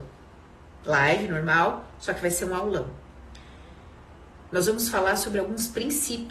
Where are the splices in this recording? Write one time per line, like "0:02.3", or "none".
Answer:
none